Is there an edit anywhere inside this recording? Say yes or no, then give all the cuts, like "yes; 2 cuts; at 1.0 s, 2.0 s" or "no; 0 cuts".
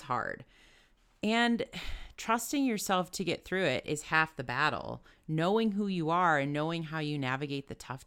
no; 0 cuts